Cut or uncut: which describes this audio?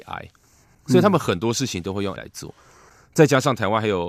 cut